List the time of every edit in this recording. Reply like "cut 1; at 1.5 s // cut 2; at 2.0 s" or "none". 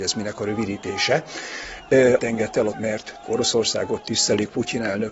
cut 1; at 2.2 s // cut 2; at 2.7 s // cut 3; at 3.2 s